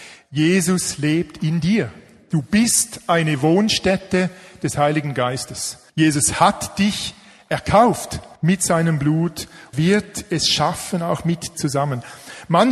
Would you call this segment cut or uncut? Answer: cut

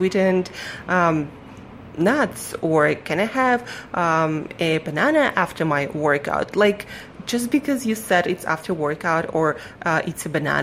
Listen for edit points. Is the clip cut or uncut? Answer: uncut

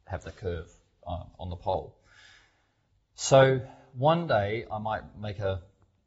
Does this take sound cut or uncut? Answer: uncut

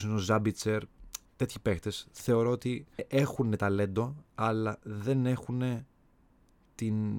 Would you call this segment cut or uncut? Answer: cut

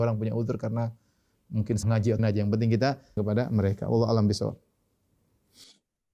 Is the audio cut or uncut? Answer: cut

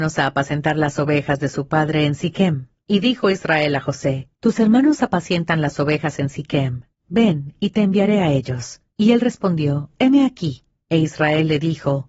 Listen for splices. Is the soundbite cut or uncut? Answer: uncut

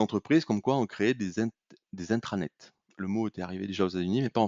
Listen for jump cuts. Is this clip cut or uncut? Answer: uncut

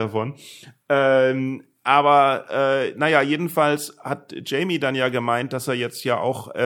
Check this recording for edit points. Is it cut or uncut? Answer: uncut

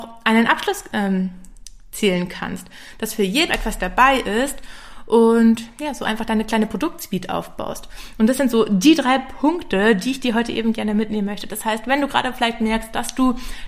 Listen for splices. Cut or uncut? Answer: cut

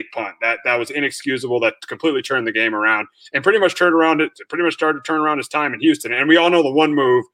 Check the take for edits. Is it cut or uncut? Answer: uncut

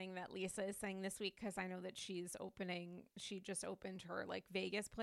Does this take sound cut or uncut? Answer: uncut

